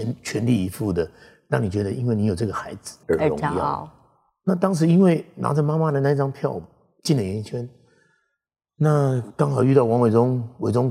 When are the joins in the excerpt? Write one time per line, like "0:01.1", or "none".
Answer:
0:03.0